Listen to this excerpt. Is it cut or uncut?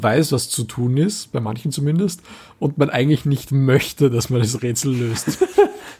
uncut